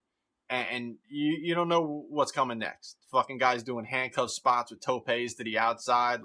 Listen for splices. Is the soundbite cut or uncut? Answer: cut